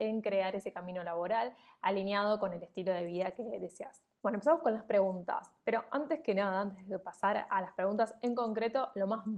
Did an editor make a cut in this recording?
no; 0 cuts

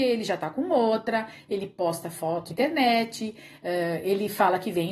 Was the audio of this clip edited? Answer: yes; 1 cut; at 2.5 s

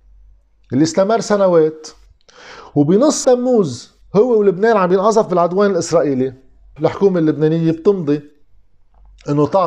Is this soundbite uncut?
no; 2 cuts; at 3.2 s, 6.8 s

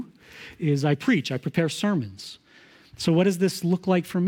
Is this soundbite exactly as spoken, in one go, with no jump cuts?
yes; 0 cuts

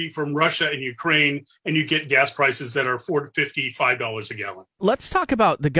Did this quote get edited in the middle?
no; 0 cuts

